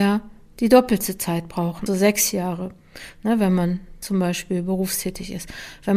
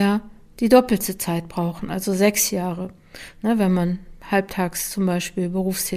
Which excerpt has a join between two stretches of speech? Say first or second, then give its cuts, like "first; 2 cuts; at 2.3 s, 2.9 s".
first; 2 cuts; at 1.9 s, 4.0 s